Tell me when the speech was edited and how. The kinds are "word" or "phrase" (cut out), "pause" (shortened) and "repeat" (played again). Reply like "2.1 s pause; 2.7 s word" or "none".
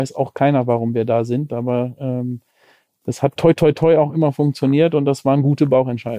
none